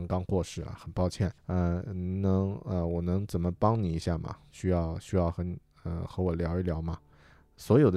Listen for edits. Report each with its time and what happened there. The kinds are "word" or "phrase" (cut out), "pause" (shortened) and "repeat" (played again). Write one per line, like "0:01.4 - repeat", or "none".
0:01.4 - pause